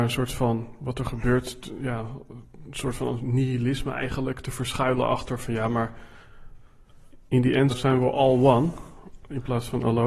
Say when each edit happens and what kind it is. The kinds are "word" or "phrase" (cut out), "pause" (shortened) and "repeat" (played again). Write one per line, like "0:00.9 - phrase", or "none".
0:07.7 - word